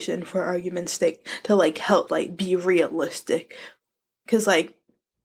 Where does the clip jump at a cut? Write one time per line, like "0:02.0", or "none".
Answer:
0:02.1